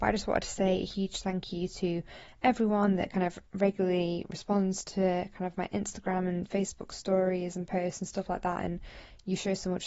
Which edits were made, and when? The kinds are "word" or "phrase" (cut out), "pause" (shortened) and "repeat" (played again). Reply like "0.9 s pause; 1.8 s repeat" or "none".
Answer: 3.5 s pause